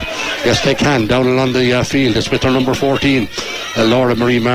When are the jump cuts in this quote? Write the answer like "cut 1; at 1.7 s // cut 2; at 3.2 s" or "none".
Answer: none